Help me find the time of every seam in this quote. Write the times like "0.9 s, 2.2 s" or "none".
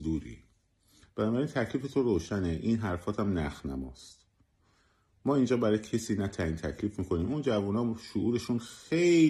none

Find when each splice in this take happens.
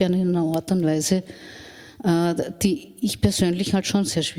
none

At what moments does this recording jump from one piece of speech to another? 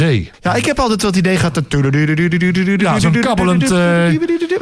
none

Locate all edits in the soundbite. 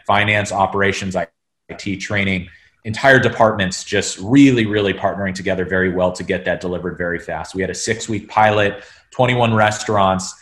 none

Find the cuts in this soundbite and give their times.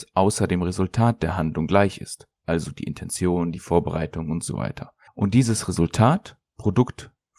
5.1 s

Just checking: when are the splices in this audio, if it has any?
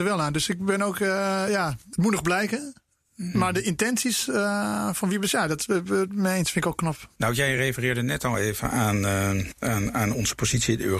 none

